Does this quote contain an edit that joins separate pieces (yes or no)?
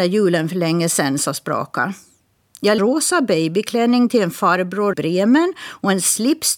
yes